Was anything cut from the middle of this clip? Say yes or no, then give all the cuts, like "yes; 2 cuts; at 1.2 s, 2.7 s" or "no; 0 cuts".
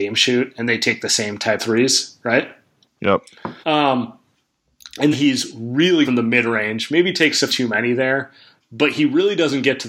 yes; 5 cuts; at 1.6 s, 3.6 s, 5.1 s, 6.0 s, 7.5 s